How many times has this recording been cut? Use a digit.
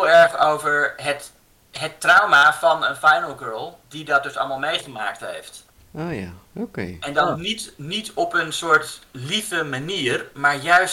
1